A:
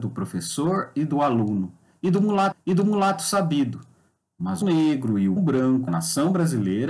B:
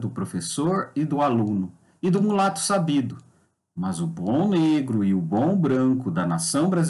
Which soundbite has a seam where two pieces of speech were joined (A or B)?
A